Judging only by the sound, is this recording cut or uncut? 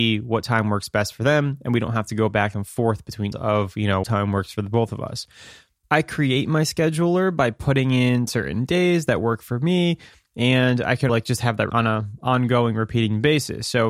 cut